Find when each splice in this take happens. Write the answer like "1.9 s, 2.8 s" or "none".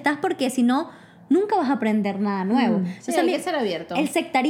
none